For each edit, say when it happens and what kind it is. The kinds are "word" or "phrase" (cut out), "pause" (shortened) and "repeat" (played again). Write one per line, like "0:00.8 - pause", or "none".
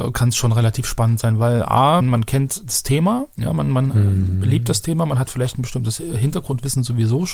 0:02.0 - word
0:03.3 - pause